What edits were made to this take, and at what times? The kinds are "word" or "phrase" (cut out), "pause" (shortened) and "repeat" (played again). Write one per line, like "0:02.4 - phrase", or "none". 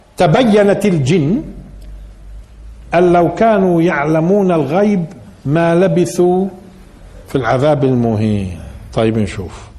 0:05.4 - pause